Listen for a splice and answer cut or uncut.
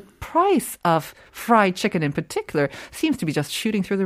uncut